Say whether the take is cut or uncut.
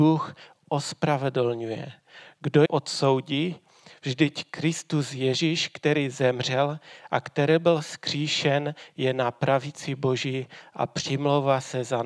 cut